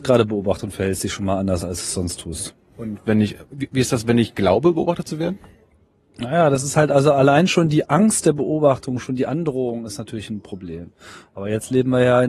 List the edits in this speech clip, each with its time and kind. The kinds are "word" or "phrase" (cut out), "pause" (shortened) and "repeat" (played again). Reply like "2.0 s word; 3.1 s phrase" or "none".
none